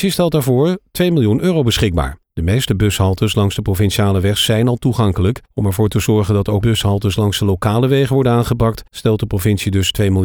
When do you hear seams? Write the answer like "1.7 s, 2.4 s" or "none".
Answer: 2.2 s, 5.5 s, 6.6 s, 8.9 s